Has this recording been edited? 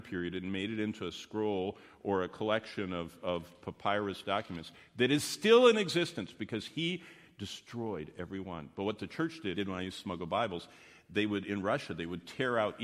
yes; 1 cut; at 9.5 s

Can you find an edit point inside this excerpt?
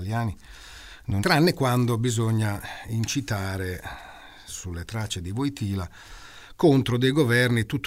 yes; 1 cut; at 1.2 s

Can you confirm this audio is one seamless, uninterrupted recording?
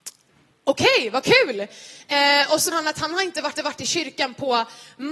no; 2 cuts; at 2.7 s, 3.5 s

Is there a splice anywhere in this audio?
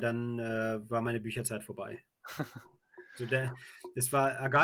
no; 0 cuts

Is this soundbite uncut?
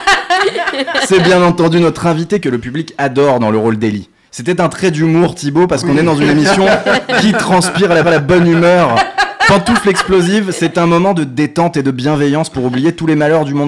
no; 1 cut; at 8.0 s

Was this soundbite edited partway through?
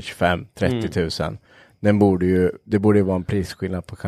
no; 0 cuts

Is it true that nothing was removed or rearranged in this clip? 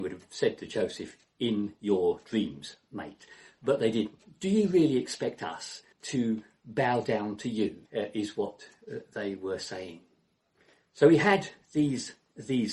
no; 3 cuts; at 5.9 s, 7.9 s, 10.5 s

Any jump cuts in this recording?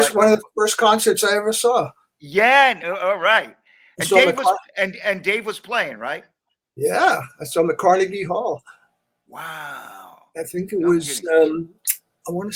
no; 0 cuts

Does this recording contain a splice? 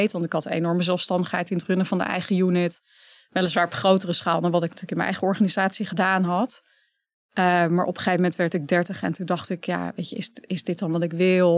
no; 0 cuts

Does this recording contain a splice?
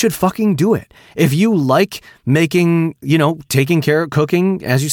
no; 0 cuts

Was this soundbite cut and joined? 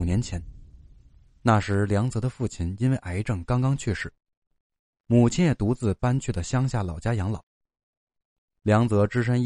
no; 0 cuts

